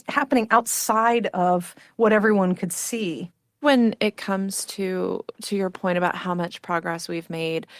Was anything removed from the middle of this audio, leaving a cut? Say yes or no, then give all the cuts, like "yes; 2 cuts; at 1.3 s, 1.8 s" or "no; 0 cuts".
no; 0 cuts